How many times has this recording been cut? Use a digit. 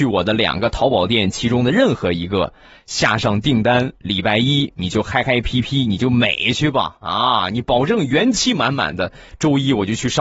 0